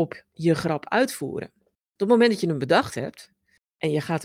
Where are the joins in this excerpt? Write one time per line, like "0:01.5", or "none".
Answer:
0:01.7